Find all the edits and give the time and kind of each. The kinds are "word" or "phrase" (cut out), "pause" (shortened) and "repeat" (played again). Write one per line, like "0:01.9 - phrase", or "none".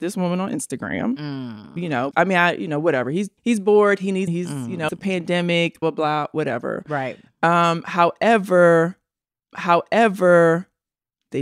0:02.1 - word
0:03.4 - pause
0:04.3 - word
0:04.9 - word
0:05.8 - word
0:09.5 - repeat